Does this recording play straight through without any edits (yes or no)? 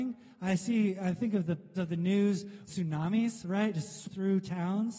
no